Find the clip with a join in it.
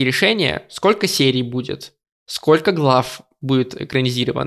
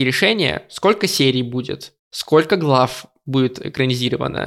second; 1 cut; at 2.0 s

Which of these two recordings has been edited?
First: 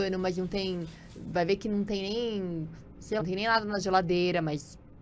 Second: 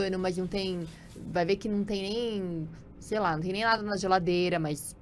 first; 1 cut; at 3.2 s

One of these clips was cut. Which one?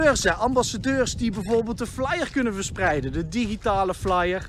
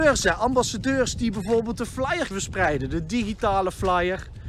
second; 1 cut; at 2.3 s

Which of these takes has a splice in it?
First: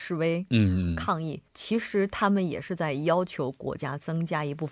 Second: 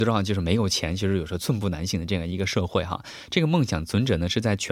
first; 1 cut; at 1.5 s

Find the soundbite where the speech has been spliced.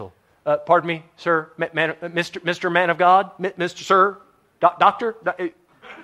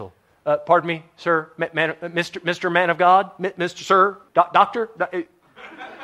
second; 1 cut; at 4.3 s

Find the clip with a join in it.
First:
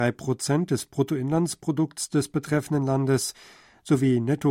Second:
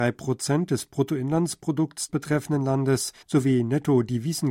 second; 2 cuts; at 2.1 s, 3.2 s

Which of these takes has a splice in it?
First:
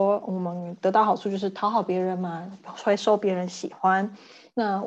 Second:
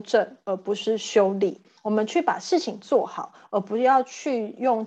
second; 1 cut; at 1.8 s

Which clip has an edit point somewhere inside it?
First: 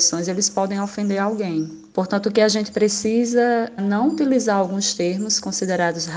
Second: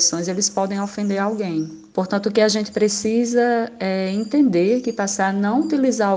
first; 1 cut; at 3.8 s

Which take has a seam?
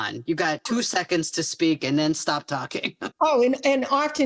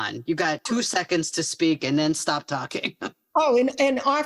first; 1 cut; at 3.1 s

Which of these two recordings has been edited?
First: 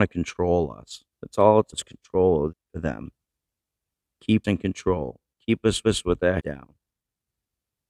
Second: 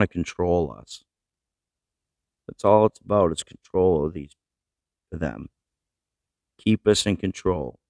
first; 6 cuts; at 1.1 s, 1.7 s, 2.5 s, 4.4 s, 5.8 s, 6.4 s

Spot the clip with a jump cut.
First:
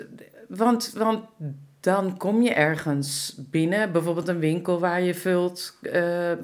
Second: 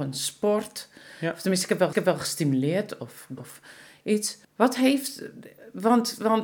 second; 3 cuts; at 1.9 s, 3.4 s, 4.4 s

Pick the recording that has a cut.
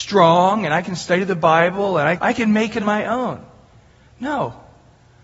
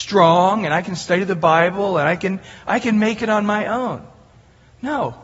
first; 2 cuts; at 2.2 s, 2.8 s

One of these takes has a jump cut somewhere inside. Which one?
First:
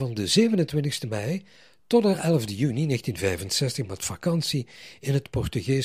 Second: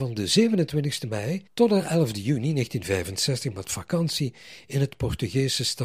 second; 1 cut; at 1.5 s

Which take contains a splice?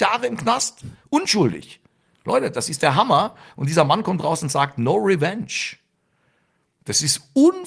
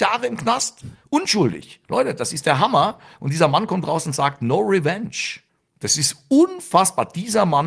second; 2 cuts; at 1.8 s, 5.5 s

